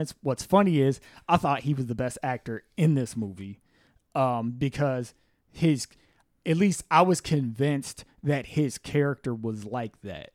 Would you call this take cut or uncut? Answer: uncut